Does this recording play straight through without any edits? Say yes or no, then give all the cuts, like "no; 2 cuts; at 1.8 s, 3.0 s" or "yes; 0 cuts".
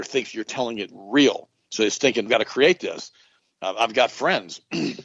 no; 1 cut; at 2.3 s